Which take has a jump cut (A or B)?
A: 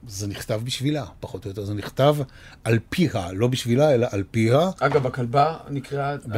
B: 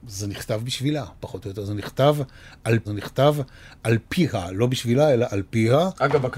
B